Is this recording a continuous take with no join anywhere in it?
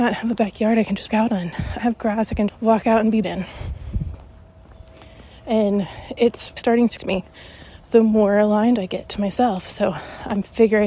no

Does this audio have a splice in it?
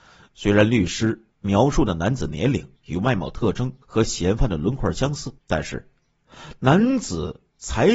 yes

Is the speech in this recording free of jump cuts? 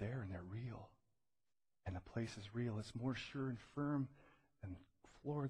yes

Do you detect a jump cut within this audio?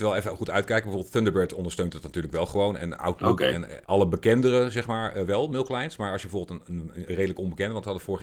yes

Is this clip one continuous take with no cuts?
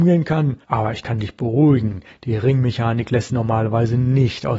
no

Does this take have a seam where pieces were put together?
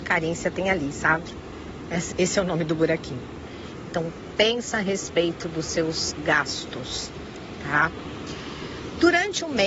yes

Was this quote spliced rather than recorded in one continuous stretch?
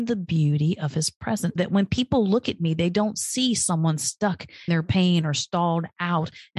yes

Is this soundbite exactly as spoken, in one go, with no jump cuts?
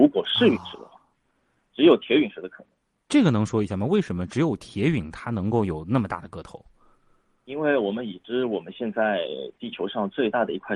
yes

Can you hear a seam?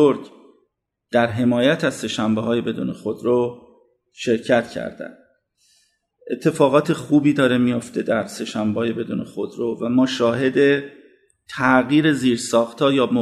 no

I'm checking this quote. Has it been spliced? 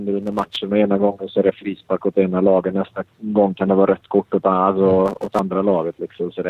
no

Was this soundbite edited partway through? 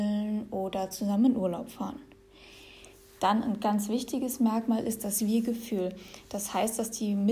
no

